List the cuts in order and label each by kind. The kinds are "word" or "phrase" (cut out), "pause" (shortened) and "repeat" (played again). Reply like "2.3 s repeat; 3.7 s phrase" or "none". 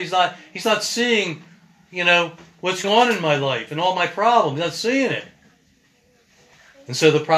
2.8 s word